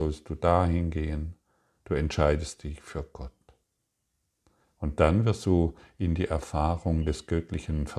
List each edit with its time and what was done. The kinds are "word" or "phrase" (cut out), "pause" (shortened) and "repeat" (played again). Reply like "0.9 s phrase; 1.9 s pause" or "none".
none